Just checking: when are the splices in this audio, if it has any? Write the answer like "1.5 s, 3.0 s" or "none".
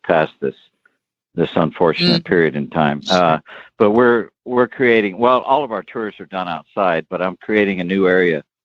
3.0 s